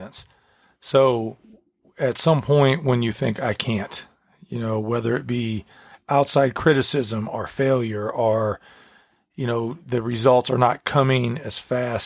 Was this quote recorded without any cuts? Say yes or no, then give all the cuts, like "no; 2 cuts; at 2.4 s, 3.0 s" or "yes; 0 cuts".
yes; 0 cuts